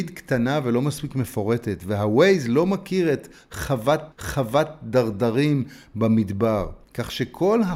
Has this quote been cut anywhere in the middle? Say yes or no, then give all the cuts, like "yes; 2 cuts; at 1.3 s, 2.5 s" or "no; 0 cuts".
yes; 2 cuts; at 4.1 s, 6.8 s